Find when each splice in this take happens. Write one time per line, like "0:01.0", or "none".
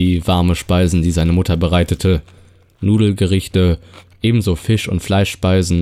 none